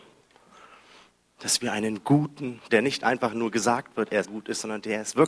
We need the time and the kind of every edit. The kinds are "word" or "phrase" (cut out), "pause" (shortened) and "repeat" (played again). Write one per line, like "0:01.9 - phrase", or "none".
0:02.7 - phrase
0:04.2 - word